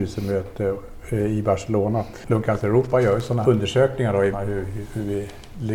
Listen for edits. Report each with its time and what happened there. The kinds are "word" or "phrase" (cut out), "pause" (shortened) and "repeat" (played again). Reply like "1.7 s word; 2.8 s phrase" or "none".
3.4 s word; 4.3 s word